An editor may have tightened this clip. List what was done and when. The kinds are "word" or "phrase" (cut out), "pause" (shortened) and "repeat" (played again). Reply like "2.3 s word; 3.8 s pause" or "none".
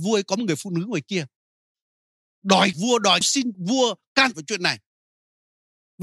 2.7 s word; 3.2 s word; 3.5 s word; 4.3 s word